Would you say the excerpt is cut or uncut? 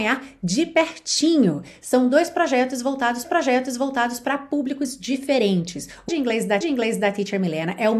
cut